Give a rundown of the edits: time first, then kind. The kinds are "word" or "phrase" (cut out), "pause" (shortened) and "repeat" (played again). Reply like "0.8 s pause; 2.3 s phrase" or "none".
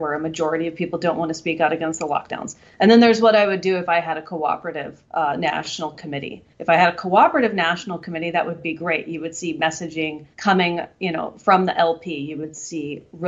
5.0 s pause; 6.5 s pause; 10.3 s pause